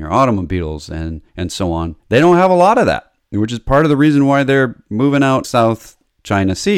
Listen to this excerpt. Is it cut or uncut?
cut